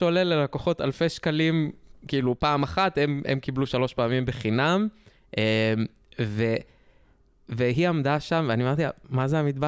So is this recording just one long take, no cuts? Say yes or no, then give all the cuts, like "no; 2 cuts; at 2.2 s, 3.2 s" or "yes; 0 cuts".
yes; 0 cuts